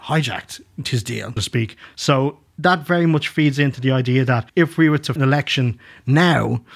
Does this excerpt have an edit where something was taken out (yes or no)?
yes